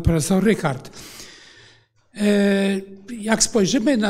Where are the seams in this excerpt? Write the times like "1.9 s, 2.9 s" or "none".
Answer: none